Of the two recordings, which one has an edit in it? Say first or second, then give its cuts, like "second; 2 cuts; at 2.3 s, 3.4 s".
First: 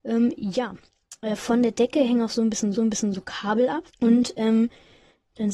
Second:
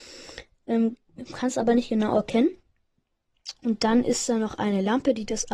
first; 2 cuts; at 2.7 s, 3.9 s